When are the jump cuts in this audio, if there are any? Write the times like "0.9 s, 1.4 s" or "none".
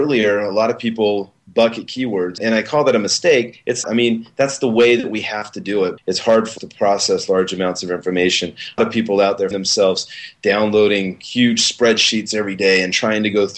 2.4 s, 3.8 s, 6.0 s, 6.6 s, 8.8 s, 9.5 s